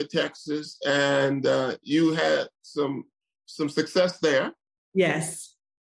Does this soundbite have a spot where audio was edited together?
no; 0 cuts

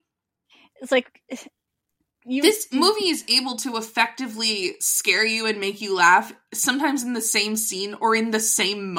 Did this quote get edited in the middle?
no; 0 cuts

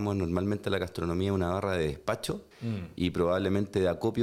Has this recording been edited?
yes; 1 cut; at 2.5 s

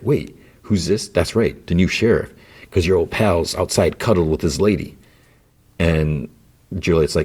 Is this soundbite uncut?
yes; 0 cuts

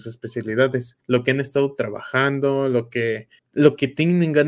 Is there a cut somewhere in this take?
yes; 2 cuts; at 1.0 s, 3.4 s

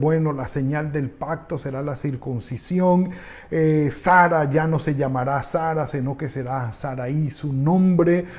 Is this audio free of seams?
yes; 0 cuts

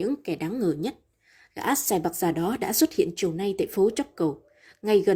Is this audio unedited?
yes; 0 cuts

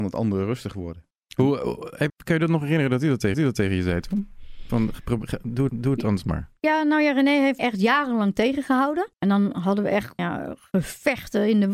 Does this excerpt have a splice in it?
yes; 7 cuts; at 1.1 s, 2.1 s, 3.3 s, 5.7 s, 7.6 s, 9.1 s, 10.2 s

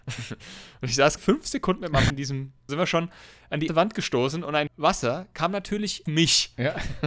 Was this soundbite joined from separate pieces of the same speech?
yes; 6 cuts; at 1.2 s, 2.1 s, 2.7 s, 3.7 s, 4.7 s, 6.1 s

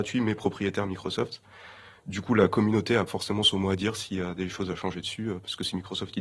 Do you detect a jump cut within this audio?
yes; 1 cut; at 3.1 s

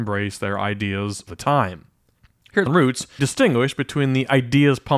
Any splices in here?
yes; 3 cuts; at 1.3 s, 2.7 s, 3.2 s

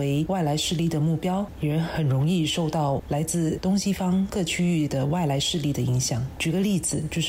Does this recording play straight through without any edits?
yes; 0 cuts

